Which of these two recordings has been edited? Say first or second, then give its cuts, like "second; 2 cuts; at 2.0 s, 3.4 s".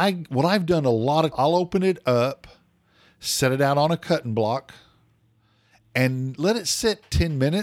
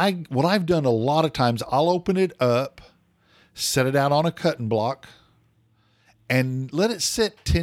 first; 1 cut; at 1.3 s